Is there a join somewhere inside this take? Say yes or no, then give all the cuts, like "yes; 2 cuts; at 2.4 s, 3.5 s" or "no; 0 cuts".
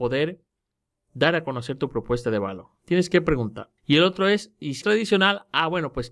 yes; 2 cuts; at 3.8 s, 4.8 s